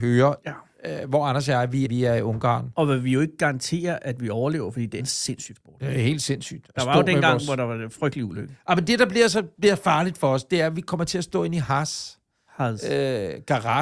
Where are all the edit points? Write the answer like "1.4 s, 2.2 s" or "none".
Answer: 1.8 s, 5.0 s, 5.6 s, 9.5 s